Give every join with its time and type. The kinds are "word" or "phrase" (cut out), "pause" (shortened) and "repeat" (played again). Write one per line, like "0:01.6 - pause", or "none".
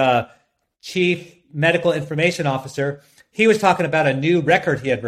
none